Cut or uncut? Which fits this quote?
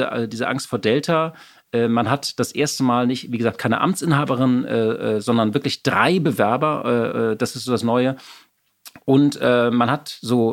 uncut